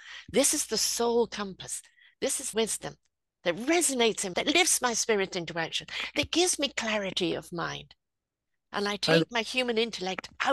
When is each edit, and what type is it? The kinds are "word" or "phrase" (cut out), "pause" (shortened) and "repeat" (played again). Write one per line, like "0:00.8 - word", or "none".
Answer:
0:02.5 - phrase
0:04.3 - phrase